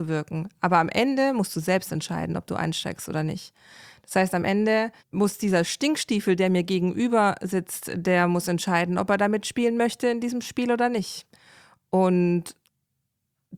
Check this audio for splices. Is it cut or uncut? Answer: cut